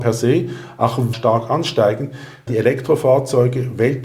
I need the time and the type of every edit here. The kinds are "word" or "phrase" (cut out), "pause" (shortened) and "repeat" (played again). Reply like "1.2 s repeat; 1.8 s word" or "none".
1.1 s phrase; 2.5 s word